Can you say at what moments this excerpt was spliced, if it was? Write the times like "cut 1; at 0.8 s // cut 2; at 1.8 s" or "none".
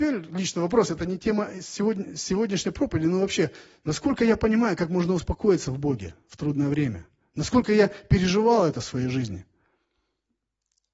none